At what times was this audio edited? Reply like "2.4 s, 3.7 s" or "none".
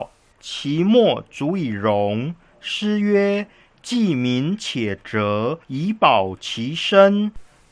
5.6 s